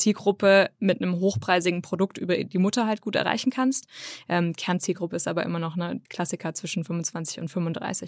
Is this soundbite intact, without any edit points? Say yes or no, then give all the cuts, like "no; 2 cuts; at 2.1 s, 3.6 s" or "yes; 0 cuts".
no; 1 cut; at 6.1 s